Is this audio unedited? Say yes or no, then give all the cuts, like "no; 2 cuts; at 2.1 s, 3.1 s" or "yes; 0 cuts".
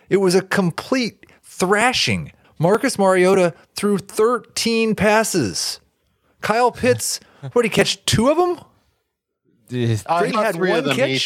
no; 2 cuts; at 2.4 s, 10.3 s